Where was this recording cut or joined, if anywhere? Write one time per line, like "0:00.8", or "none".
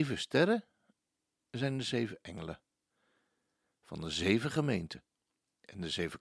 none